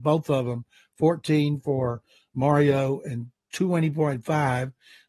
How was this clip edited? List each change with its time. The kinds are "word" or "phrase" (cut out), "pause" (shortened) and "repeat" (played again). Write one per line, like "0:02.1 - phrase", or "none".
none

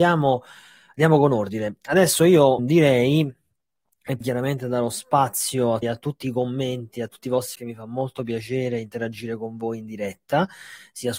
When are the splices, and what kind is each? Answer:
0:02.6 - word
0:04.2 - word
0:05.8 - word
0:07.6 - phrase

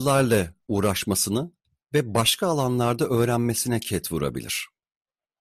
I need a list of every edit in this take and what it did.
none

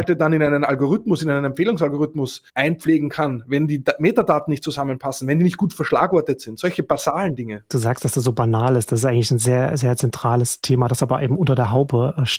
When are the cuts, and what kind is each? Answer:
0:02.5 - pause

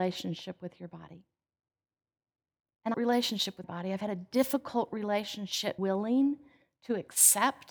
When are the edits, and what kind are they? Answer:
0:02.9 - phrase
0:03.6 - word
0:05.8 - word

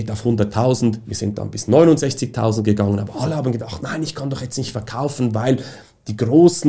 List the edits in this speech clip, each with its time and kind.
none

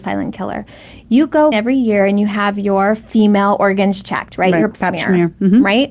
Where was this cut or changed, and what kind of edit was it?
0:01.5 - word
0:04.7 - word

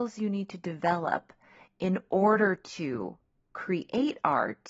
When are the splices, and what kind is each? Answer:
none

